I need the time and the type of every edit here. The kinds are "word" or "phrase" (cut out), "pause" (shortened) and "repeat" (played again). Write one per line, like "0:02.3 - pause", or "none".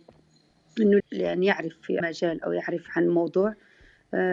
0:01.0 - phrase
0:02.0 - word